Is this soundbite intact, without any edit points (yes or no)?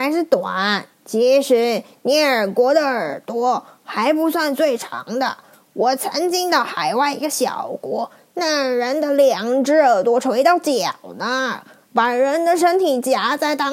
no